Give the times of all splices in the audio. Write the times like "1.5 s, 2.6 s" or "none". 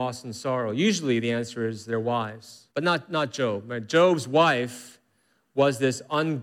2.7 s